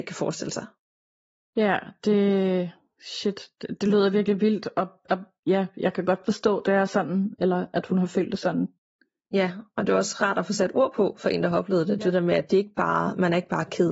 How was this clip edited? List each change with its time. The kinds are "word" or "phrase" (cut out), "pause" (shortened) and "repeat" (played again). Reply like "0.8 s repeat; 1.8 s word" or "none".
none